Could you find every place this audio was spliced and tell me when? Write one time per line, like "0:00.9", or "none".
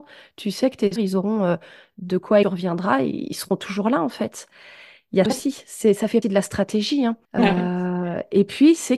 0:01.0
0:02.4
0:05.3
0:06.2
0:07.2